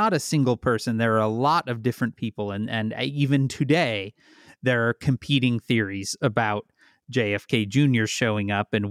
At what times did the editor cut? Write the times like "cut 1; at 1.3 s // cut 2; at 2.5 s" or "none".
none